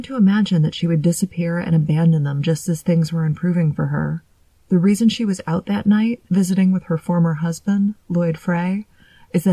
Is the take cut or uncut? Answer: cut